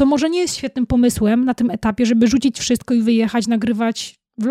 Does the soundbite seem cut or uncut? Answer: uncut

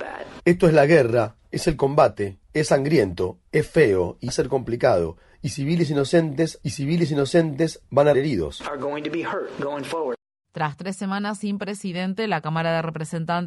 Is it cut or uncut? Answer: cut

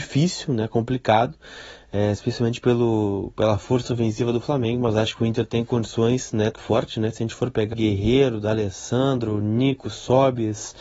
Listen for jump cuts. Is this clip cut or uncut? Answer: cut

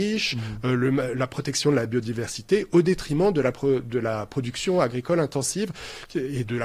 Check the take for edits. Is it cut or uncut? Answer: uncut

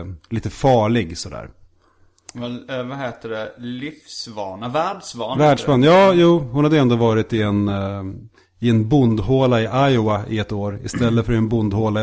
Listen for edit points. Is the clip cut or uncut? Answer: uncut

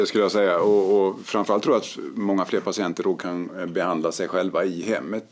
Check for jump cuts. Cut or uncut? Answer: uncut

